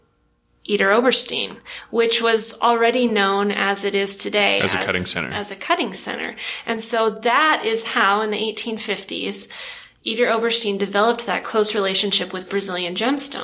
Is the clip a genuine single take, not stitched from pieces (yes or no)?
yes